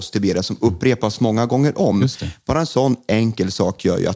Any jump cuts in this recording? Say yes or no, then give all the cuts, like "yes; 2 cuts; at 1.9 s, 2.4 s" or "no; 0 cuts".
no; 0 cuts